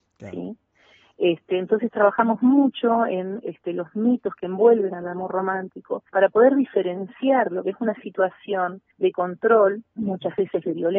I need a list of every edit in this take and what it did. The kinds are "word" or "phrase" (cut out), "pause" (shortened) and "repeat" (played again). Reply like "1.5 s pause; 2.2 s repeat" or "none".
6.1 s pause; 8.9 s pause; 9.9 s pause